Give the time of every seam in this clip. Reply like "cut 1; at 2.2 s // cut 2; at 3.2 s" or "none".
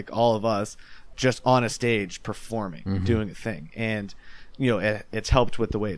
cut 1; at 1.1 s